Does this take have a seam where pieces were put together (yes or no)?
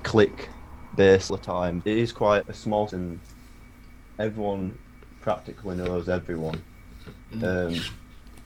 yes